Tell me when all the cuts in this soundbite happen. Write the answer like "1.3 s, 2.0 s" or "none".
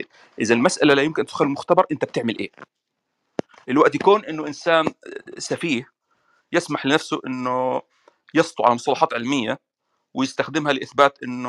none

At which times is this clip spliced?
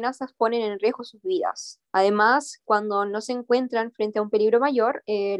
1.9 s

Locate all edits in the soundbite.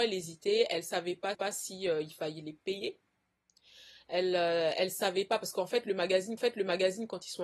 1.3 s, 6.4 s

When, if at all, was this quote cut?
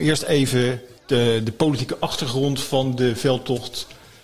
1.0 s

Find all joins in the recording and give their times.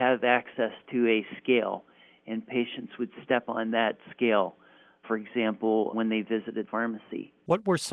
6.7 s

